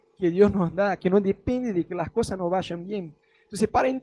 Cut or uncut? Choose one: uncut